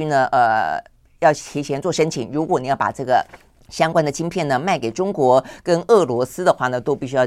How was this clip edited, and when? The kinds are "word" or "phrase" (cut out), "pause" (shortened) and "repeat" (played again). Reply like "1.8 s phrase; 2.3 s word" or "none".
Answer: 3.6 s pause